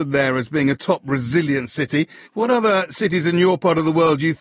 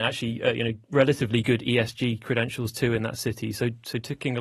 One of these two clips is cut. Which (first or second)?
first